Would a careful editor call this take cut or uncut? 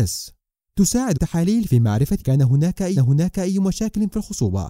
cut